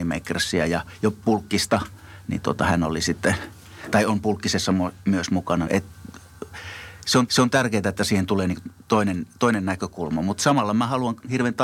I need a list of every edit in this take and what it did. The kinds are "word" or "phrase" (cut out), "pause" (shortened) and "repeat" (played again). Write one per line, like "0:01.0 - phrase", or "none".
0:05.7 - phrase
0:07.3 - repeat